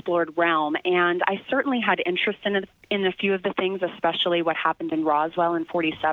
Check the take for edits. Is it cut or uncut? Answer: uncut